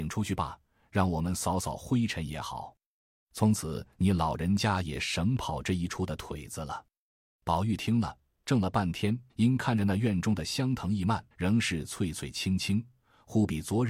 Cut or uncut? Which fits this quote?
cut